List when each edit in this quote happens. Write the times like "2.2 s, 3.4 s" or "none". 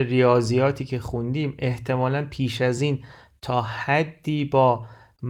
none